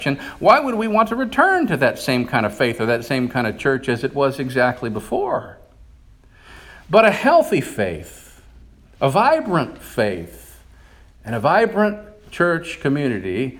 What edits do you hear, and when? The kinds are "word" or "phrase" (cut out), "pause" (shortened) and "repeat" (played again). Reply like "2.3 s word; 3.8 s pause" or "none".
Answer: none

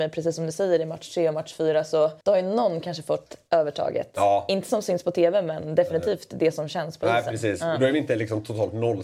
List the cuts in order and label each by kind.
2.2 s pause

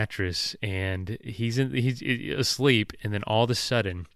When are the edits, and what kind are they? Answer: none

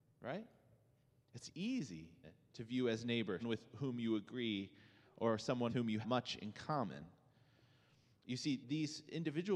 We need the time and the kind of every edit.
2.2 s word; 3.4 s word; 5.7 s word; 6.0 s word; 8.6 s word

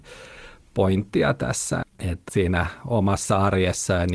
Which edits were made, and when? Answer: 1.8 s word; 2.3 s word

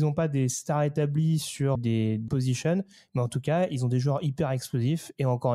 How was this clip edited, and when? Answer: 1.8 s word; 2.3 s word

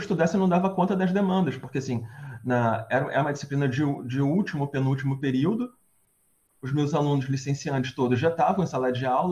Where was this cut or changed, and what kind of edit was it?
none

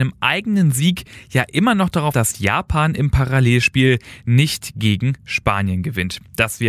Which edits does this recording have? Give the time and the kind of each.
2.1 s word

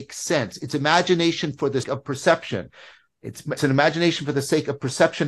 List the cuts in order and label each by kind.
1.8 s word; 3.6 s word

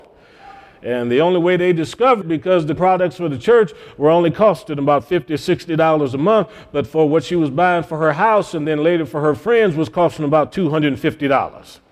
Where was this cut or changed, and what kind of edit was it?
2.2 s word; 2.8 s word

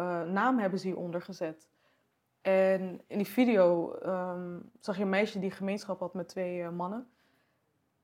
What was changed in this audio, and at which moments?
none

